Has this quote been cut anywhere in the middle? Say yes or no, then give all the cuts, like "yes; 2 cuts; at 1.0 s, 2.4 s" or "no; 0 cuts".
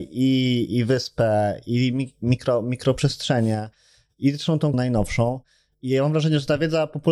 yes; 1 cut; at 4.7 s